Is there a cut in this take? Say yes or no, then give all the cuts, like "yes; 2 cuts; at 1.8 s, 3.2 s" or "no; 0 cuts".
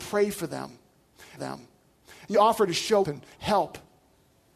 yes; 3 cuts; at 1.4 s, 2.3 s, 3.0 s